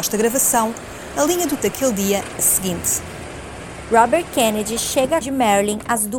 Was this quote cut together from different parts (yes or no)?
yes